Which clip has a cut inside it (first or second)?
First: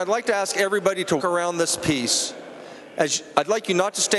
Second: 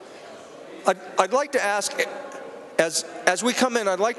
first